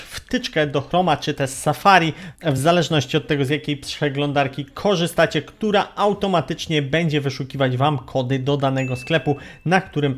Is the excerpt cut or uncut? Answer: uncut